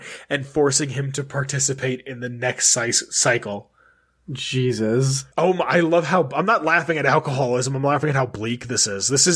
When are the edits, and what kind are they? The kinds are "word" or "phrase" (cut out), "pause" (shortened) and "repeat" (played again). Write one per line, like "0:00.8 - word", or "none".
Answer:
0:05.3 - pause